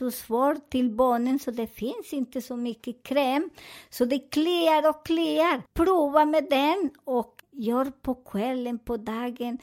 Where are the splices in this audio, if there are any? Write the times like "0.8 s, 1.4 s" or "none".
5.7 s, 7.4 s